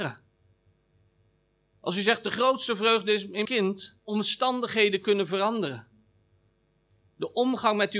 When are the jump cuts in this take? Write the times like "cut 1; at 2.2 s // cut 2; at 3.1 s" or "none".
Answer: cut 1; at 3.4 s // cut 2; at 4.0 s